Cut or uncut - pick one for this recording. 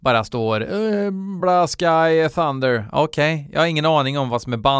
cut